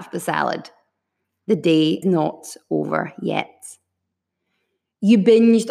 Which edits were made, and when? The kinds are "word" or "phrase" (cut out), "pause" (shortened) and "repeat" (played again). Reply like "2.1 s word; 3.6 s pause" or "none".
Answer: 2.0 s word